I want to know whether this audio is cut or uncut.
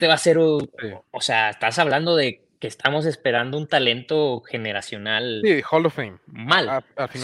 uncut